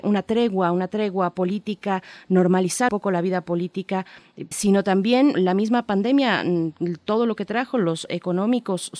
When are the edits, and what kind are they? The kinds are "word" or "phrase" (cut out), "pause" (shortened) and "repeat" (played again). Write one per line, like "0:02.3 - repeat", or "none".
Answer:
0:02.9 - word
0:04.5 - word
0:05.3 - word
0:08.1 - word